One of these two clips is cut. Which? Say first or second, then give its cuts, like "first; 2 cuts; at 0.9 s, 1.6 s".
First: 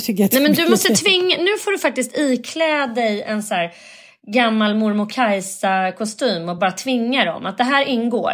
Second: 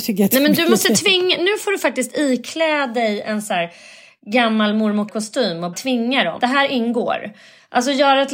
second; 3 cuts; at 5.1 s, 5.7 s, 6.4 s